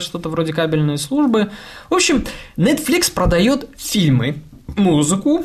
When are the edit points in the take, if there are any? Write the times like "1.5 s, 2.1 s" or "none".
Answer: 2.5 s